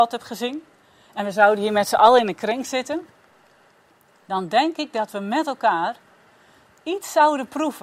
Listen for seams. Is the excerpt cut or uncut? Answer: uncut